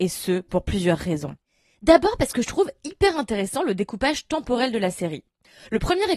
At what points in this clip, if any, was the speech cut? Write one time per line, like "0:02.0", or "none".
none